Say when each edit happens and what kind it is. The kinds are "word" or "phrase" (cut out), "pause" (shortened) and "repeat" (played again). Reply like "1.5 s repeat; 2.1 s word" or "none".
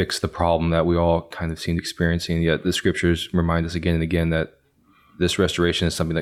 1.8 s phrase